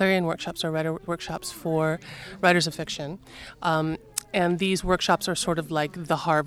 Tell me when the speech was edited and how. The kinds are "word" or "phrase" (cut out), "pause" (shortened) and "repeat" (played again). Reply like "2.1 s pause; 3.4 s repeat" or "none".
1.1 s word; 2.7 s word